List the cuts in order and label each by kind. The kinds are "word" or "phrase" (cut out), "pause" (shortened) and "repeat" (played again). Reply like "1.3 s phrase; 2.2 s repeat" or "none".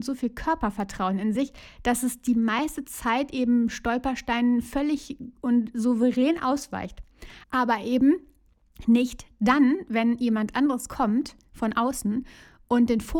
7.4 s pause